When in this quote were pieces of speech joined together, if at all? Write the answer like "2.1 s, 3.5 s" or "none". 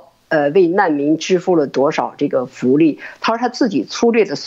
none